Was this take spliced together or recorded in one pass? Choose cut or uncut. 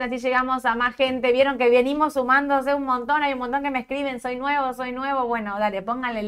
uncut